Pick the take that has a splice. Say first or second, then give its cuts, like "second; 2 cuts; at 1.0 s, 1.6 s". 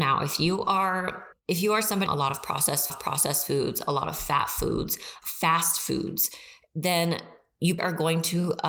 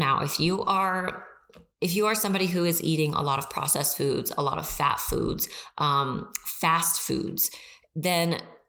first; 5 cuts; at 1.3 s, 2.1 s, 2.9 s, 5.2 s, 7.8 s